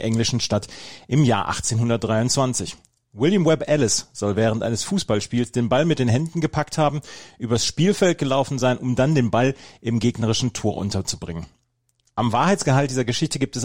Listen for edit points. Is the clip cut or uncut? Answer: uncut